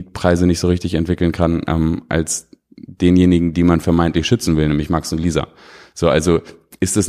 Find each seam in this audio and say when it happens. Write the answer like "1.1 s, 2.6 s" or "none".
none